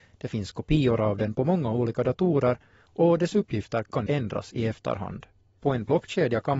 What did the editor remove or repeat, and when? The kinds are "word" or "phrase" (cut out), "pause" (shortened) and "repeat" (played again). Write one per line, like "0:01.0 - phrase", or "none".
0:04.1 - word